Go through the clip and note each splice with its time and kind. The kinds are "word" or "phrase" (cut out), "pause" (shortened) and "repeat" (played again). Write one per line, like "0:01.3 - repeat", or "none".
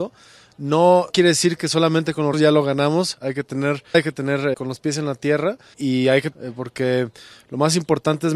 0:01.1 - word
0:02.3 - word
0:03.9 - word
0:04.5 - word
0:05.7 - word
0:06.3 - word